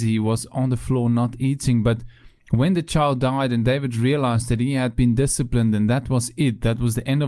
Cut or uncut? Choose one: uncut